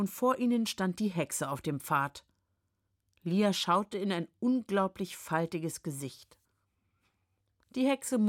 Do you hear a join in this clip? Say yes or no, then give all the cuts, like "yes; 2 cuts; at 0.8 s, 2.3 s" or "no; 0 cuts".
no; 0 cuts